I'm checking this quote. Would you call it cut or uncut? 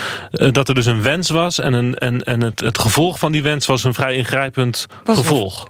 uncut